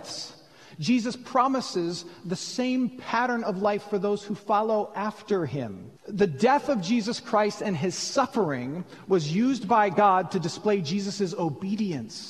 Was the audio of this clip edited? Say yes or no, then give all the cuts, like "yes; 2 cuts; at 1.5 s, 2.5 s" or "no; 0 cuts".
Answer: yes; 1 cut; at 6.0 s